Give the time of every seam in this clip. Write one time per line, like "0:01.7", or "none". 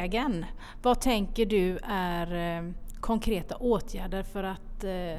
none